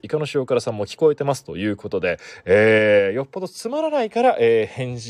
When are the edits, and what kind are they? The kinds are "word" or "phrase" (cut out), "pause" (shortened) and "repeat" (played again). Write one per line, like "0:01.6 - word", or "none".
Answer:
none